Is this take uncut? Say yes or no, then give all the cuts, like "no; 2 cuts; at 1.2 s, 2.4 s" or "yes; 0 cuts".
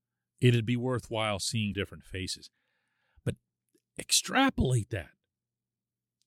no; 1 cut; at 1.7 s